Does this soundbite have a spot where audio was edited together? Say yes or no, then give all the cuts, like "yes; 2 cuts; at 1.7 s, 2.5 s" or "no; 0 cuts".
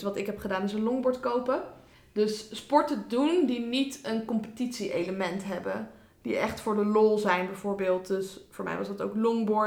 no; 0 cuts